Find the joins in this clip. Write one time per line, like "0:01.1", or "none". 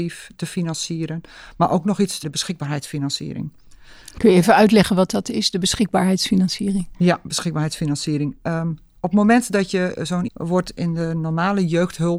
0:02.2
0:10.3